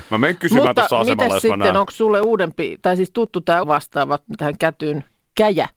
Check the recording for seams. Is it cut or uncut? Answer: cut